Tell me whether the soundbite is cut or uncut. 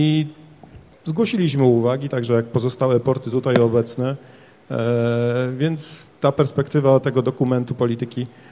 uncut